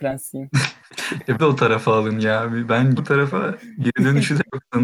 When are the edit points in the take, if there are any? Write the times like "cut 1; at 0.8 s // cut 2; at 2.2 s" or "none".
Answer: cut 1; at 1.4 s // cut 2; at 3.0 s